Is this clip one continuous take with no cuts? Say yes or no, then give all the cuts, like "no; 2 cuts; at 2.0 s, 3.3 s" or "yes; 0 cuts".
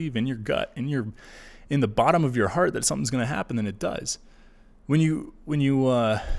yes; 0 cuts